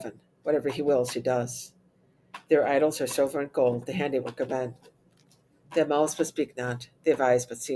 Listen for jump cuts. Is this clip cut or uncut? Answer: uncut